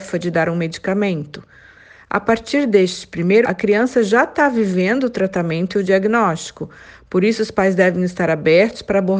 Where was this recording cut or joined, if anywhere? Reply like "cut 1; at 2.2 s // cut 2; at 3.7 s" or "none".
cut 1; at 3.4 s

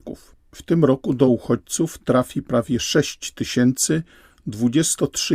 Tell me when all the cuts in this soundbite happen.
none

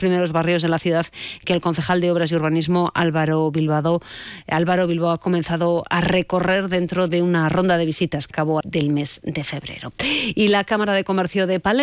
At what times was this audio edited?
cut 1; at 8.3 s // cut 2; at 8.6 s

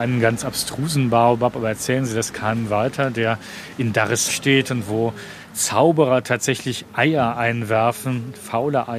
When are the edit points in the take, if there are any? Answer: cut 1; at 4.3 s

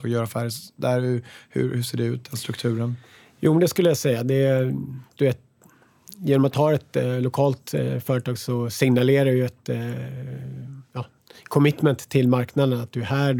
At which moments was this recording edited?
none

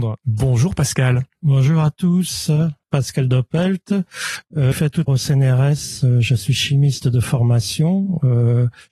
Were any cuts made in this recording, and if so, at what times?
cut 1; at 2.8 s // cut 2; at 4.7 s // cut 3; at 5.1 s

